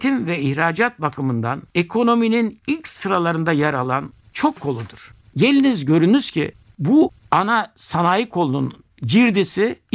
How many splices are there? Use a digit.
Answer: 2